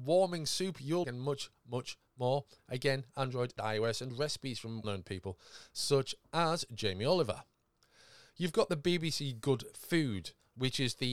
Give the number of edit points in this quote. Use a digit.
3